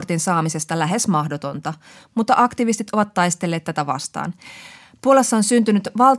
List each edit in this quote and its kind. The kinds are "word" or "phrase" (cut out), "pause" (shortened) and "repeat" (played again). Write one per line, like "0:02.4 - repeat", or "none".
none